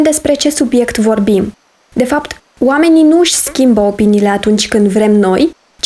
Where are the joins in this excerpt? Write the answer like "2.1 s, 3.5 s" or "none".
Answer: none